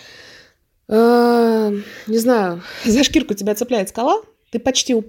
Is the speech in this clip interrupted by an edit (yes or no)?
no